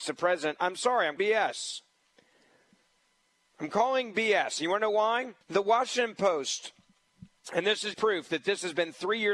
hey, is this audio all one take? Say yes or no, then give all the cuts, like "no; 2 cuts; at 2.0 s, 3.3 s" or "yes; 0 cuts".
no; 3 cuts; at 1.2 s, 5.4 s, 7.9 s